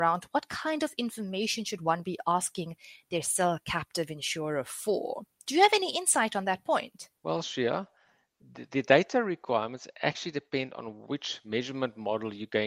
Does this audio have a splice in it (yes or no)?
yes